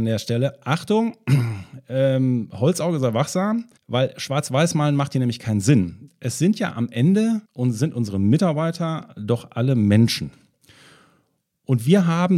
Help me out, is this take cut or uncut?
cut